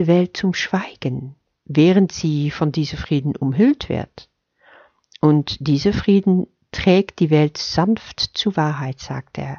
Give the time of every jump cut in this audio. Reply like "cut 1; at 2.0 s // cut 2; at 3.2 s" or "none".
none